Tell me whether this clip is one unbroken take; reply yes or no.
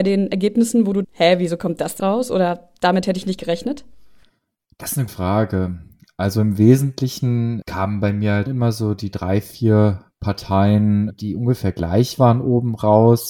no